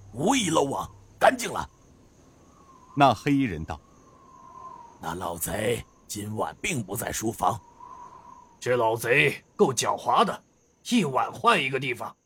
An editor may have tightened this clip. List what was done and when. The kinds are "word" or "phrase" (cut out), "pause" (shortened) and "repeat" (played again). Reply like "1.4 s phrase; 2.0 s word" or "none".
none

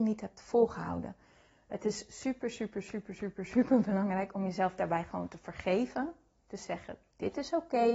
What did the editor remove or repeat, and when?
none

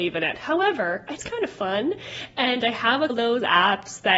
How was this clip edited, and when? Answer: 1.2 s word; 3.1 s word

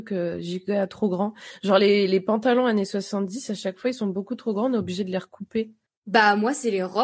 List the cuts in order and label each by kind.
none

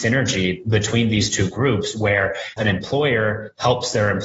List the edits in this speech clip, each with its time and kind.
2.6 s word

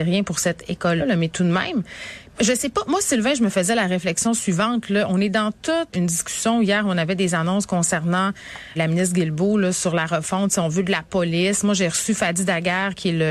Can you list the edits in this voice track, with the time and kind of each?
1.0 s word; 2.3 s word; 5.9 s word; 8.8 s word

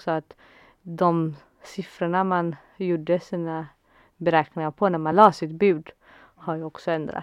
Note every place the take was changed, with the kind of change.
none

